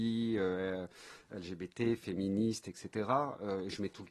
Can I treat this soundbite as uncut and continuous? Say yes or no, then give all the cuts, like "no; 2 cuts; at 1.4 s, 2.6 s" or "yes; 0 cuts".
yes; 0 cuts